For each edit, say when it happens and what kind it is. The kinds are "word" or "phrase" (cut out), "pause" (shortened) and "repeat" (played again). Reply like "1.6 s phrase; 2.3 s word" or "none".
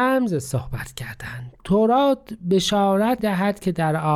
1.6 s word; 3.2 s word